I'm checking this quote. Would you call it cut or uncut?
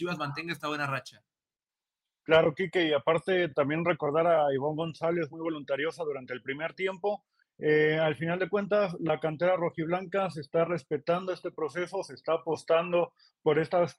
uncut